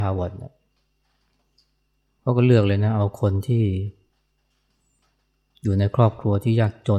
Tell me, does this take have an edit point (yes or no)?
no